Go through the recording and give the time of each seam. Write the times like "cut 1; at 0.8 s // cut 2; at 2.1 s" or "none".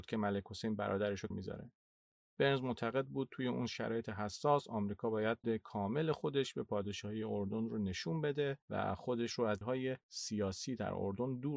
cut 1; at 1.3 s // cut 2; at 5.4 s // cut 3; at 9.6 s